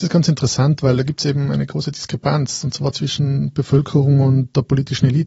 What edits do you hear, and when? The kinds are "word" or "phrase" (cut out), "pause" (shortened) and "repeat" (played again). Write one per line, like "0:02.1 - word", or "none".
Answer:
none

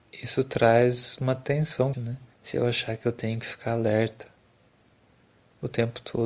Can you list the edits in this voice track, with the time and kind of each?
0:01.9 - word
0:02.3 - pause

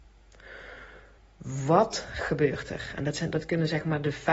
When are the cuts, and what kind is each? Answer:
0:01.2 - pause

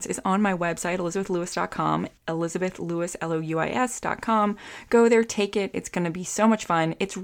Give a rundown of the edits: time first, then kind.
0:02.2 - pause

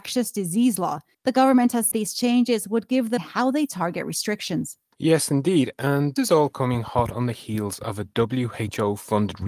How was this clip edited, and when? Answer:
0:01.1 - pause
0:01.9 - word
0:03.2 - phrase
0:06.2 - word

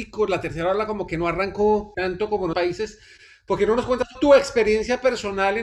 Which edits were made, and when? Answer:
0:01.9 - word
0:02.5 - word
0:04.1 - phrase

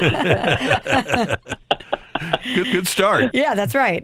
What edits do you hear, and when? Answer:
0:02.6 - repeat

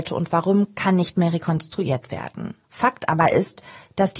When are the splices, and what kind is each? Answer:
0:02.6 - pause

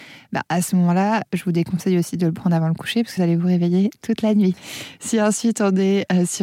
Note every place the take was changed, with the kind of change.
0:03.2 - phrase

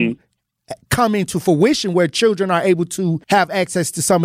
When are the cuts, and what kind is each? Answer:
0:03.2 - pause

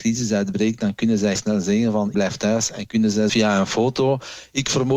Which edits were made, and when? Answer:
0:01.4 - word
0:02.1 - word
0:03.3 - phrase

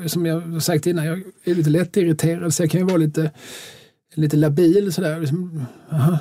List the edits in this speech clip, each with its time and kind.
none

